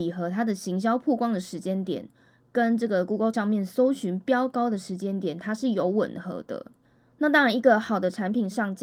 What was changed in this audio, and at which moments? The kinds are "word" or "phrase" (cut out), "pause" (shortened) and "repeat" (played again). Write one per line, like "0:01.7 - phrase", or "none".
0:03.3 - word